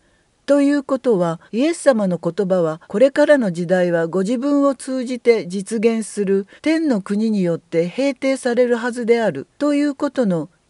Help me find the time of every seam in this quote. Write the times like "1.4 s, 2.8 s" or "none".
1.5 s, 2.8 s, 6.6 s, 9.5 s